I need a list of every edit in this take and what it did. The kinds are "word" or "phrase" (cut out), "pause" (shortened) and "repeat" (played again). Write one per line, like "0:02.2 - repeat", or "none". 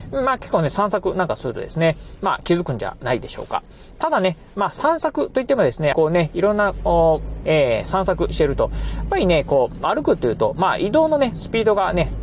0:05.9 - phrase
0:07.4 - word